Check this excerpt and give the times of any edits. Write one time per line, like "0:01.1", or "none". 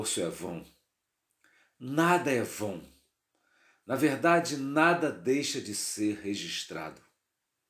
none